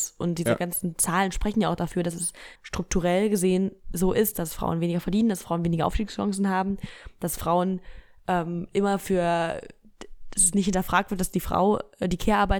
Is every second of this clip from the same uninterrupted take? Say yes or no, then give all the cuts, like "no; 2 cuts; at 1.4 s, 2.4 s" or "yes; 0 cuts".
no; 1 cut; at 2.6 s